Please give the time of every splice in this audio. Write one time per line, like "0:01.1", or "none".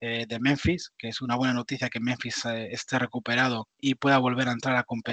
0:03.7